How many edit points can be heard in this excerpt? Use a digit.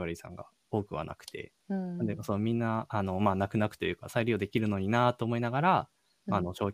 1